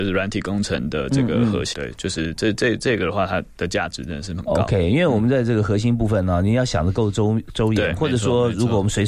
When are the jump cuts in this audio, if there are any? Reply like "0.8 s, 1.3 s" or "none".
1.7 s